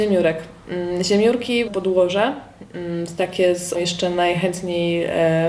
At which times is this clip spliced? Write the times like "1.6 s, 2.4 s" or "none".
1.7 s, 3.7 s